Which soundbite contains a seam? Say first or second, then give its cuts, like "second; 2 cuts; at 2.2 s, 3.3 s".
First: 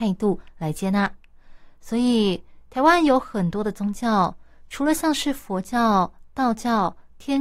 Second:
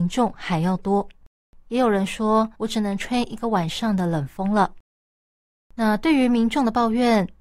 second; 1 cut; at 2.5 s